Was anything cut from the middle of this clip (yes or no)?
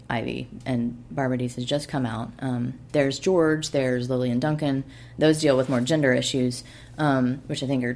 no